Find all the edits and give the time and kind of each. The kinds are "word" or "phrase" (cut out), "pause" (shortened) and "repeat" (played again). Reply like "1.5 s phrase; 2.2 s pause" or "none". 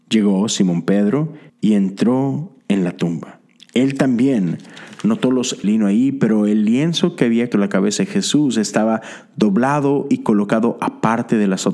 1.5 s pause; 2.6 s pause; 3.6 s pause; 5.6 s phrase; 7.5 s word